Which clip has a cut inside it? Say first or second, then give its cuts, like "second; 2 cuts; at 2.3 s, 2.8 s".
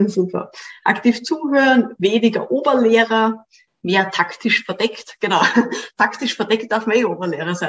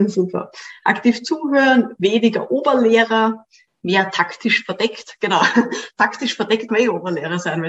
second; 1 cut; at 6.7 s